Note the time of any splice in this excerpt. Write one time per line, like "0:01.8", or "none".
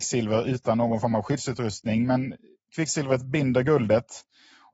none